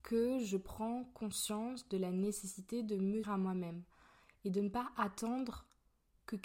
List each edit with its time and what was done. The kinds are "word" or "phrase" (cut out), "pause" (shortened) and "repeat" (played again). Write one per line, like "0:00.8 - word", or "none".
0:03.2 - word